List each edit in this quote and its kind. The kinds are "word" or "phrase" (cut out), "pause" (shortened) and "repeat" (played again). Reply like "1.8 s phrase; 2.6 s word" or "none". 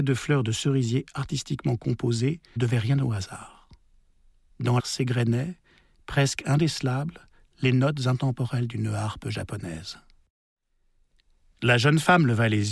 2.6 s word; 4.8 s word